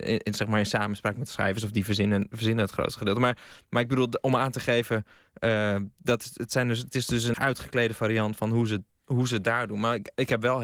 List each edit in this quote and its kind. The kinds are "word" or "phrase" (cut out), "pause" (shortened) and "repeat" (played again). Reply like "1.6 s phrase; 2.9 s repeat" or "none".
7.3 s word; 8.4 s word

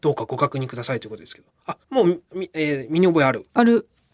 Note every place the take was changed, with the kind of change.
1.8 s pause

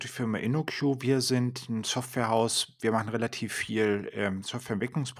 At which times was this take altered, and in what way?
none

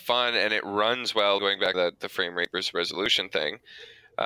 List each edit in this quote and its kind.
1.4 s word; 1.7 s word

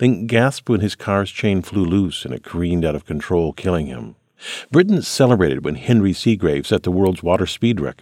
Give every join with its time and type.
none

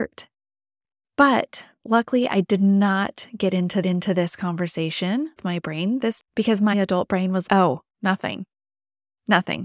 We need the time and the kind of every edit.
3.8 s repeat; 5.4 s word; 6.2 s word; 6.7 s word; 7.5 s word

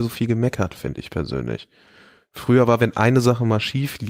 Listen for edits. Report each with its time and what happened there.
none

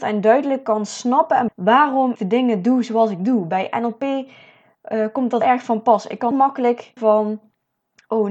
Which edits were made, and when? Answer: 1.5 s word; 2.2 s word; 5.4 s word; 6.3 s word; 7.0 s word

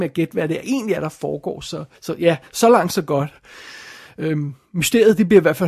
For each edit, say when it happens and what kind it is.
2.0 s pause

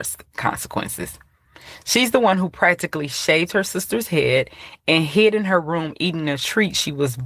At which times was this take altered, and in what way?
none

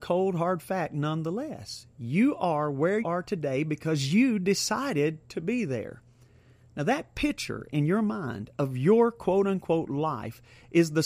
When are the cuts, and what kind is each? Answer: 3.0 s word

